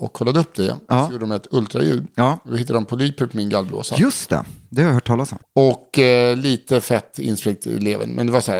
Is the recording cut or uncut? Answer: cut